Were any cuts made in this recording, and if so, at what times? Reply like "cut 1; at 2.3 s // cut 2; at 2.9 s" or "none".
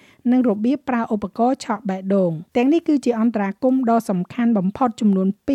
cut 1; at 2.5 s